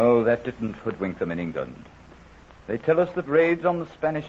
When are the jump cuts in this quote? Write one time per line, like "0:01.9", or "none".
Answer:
none